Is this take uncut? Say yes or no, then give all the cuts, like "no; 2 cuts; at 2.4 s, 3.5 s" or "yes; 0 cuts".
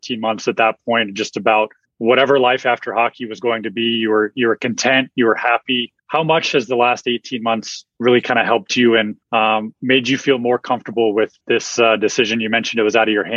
no; 4 cuts; at 1.8 s, 6.0 s, 9.2 s, 11.4 s